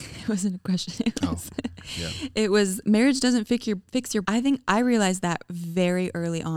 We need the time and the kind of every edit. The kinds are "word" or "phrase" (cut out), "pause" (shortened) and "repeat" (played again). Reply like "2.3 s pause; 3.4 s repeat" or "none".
4.2 s phrase